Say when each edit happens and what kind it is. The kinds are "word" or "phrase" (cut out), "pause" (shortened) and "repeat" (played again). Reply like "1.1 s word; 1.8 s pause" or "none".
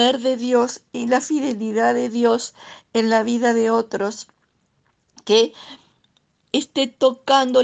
none